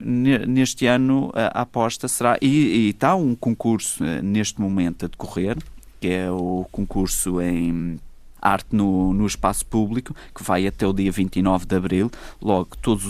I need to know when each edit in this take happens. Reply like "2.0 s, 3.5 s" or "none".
none